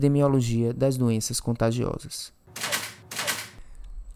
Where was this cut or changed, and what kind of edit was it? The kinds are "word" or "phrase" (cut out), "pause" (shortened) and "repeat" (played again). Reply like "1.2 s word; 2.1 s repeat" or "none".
none